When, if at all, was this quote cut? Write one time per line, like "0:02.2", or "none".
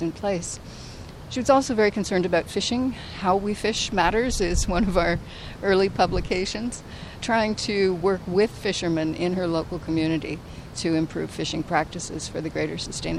0:07.2